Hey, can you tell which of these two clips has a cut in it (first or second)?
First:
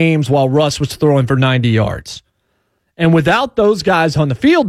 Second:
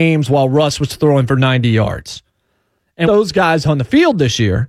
second